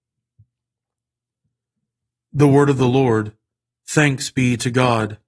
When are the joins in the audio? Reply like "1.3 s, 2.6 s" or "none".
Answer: none